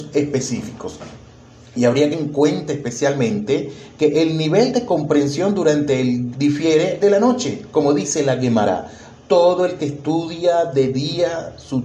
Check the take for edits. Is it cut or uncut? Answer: cut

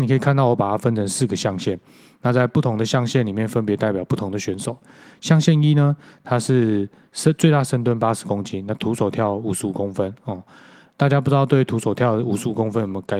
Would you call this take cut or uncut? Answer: uncut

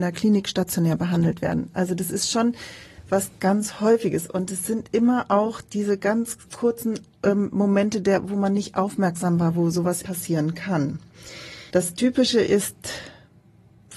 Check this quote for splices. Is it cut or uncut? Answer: cut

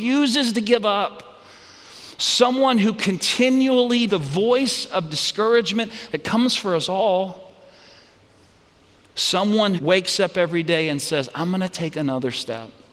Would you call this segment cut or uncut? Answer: cut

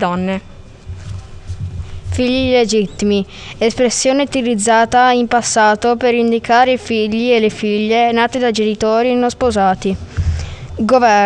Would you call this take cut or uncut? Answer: uncut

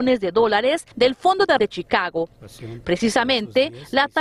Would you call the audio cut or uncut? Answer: cut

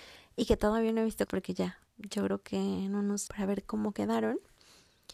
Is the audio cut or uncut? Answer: cut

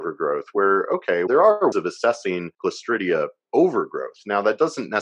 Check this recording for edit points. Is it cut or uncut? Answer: cut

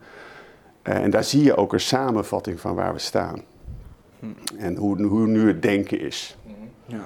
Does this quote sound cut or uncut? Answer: uncut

